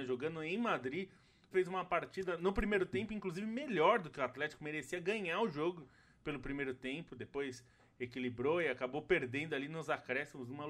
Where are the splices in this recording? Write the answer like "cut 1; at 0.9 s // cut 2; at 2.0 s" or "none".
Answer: cut 1; at 1.5 s